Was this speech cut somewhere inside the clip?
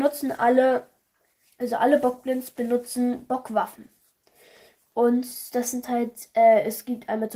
no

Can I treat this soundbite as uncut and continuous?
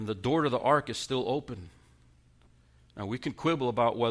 yes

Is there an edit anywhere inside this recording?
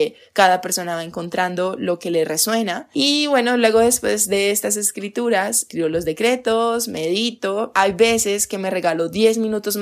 no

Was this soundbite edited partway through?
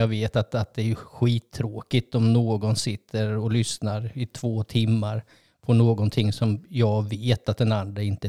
no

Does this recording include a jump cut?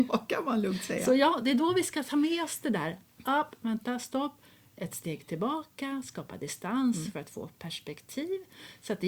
no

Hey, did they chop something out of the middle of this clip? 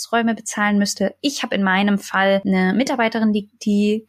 no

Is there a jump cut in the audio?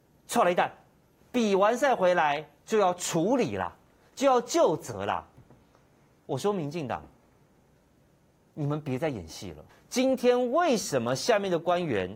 yes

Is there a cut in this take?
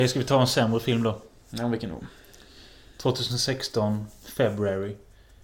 no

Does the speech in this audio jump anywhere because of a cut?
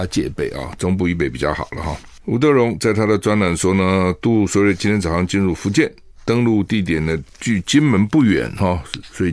no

